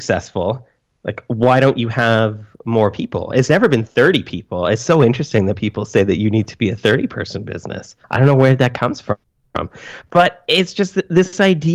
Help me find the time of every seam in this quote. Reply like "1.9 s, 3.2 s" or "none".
8.0 s